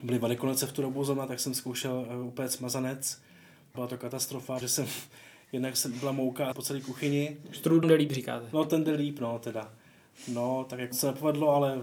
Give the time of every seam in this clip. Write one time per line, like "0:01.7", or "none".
0:03.7
0:04.6
0:06.5
0:07.8
0:10.9